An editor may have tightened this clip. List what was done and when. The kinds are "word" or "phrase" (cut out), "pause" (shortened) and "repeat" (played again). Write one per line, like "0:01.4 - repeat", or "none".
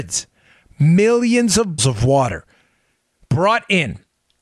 0:01.8 - word